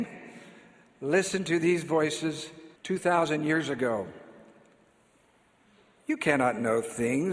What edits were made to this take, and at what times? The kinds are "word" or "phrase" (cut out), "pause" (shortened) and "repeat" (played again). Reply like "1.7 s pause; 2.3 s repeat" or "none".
2.8 s pause